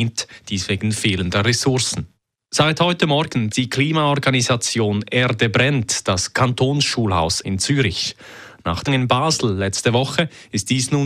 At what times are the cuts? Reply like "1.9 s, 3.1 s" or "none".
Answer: 2.2 s, 3.5 s, 7.4 s, 8.9 s

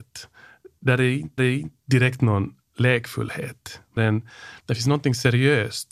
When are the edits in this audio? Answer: 1.4 s, 4.0 s, 4.6 s

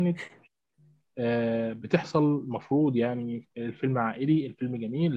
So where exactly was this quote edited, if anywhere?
3.5 s

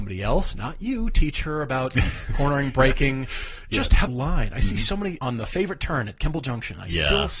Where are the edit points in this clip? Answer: 4.1 s, 5.2 s

